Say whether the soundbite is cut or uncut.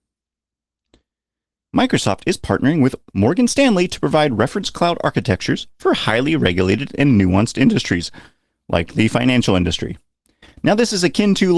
uncut